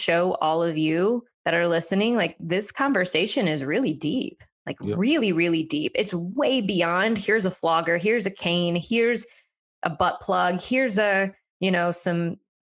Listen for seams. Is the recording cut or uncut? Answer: uncut